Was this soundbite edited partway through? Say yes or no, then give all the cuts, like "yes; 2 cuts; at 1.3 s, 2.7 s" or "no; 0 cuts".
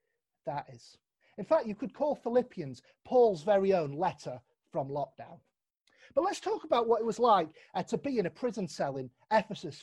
no; 0 cuts